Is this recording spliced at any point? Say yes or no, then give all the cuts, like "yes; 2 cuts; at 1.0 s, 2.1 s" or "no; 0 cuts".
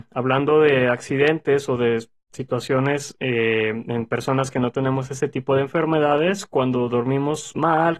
no; 0 cuts